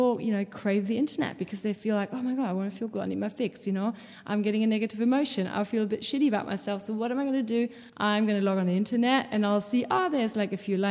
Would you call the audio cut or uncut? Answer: cut